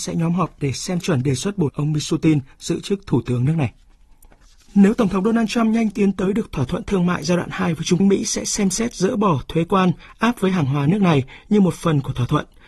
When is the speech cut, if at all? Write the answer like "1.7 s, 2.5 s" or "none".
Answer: 1.0 s, 1.7 s, 4.4 s, 5.9 s, 8.0 s

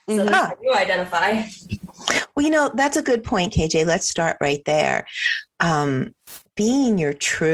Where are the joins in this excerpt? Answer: 4.1 s

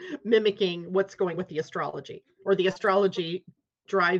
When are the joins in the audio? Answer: 1.4 s

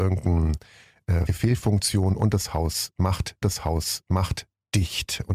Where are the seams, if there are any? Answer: 1.3 s, 3.4 s

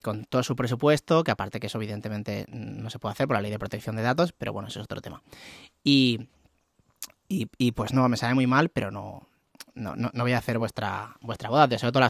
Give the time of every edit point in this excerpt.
none

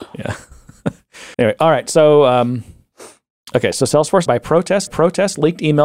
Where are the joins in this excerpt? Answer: 1.3 s, 4.3 s, 4.9 s

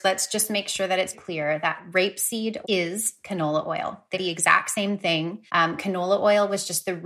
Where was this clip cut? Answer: 1.1 s, 2.6 s, 4.1 s, 5.5 s

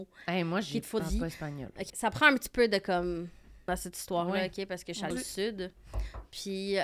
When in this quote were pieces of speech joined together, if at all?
1.0 s, 1.9 s, 3.7 s, 5.1 s

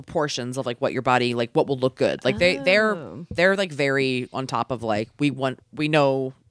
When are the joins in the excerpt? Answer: 5.6 s

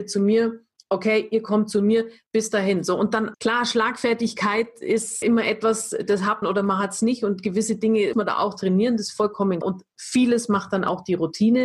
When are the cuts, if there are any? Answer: 3.3 s, 5.2 s, 6.4 s, 8.1 s, 9.6 s

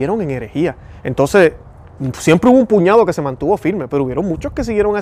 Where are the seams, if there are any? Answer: none

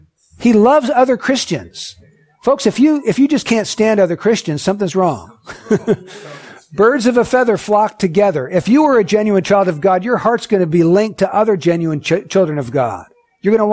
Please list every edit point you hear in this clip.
none

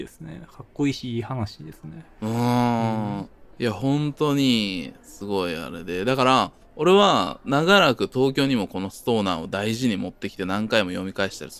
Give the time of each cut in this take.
3.5 s

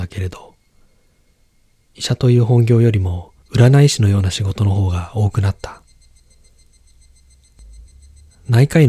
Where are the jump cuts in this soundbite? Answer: 3.4 s

